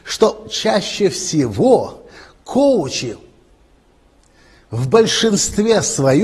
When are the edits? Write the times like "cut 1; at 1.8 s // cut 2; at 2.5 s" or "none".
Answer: none

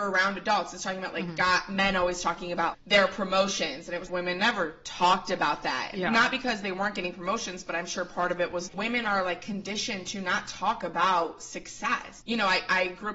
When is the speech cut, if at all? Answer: cut 1; at 2.7 s // cut 2; at 4.1 s // cut 3; at 8.7 s

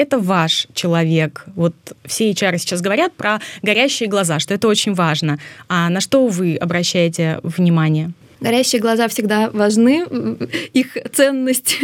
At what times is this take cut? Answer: none

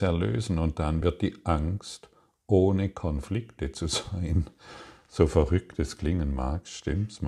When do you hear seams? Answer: none

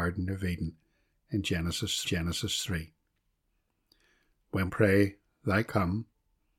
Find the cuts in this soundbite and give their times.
cut 1; at 2.0 s // cut 2; at 4.7 s // cut 3; at 5.6 s

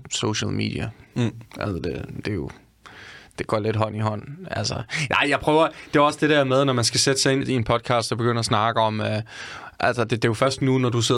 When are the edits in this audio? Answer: cut 1; at 1.5 s // cut 2; at 7.4 s

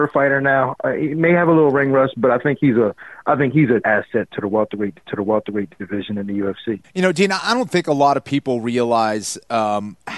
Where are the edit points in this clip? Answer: cut 1; at 3.8 s // cut 2; at 5.0 s // cut 3; at 6.8 s

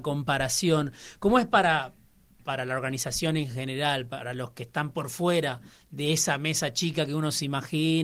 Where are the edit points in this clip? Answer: none

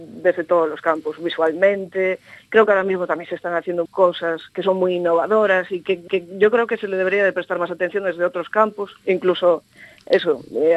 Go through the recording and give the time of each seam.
cut 1; at 3.9 s // cut 2; at 4.5 s // cut 3; at 6.1 s

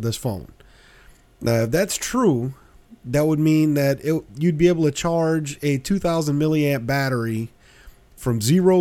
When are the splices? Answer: none

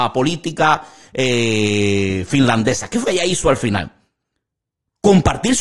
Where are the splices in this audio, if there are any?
cut 1; at 3.0 s

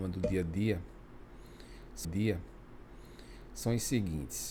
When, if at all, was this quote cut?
cut 1; at 2.0 s

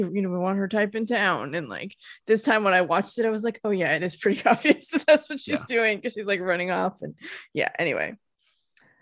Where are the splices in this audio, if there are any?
none

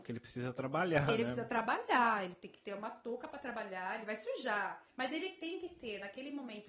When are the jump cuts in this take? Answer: cut 1; at 4.9 s

